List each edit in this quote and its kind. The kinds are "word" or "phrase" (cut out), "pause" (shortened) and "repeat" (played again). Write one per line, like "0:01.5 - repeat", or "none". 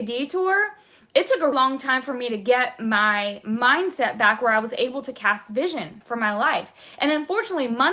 0:01.5 - word